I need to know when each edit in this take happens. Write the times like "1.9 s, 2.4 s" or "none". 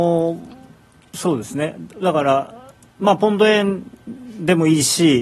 none